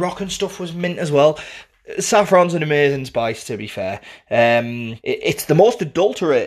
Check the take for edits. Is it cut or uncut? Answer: cut